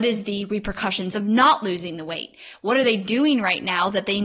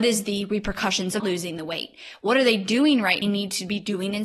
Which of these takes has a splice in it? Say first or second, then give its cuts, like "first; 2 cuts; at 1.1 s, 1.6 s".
second; 2 cuts; at 1.2 s, 3.2 s